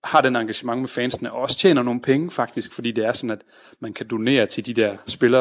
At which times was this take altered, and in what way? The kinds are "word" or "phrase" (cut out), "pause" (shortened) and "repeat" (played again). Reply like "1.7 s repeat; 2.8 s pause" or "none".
none